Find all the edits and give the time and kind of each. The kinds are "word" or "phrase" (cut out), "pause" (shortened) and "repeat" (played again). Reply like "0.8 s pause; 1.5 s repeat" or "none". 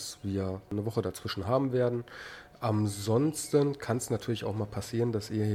none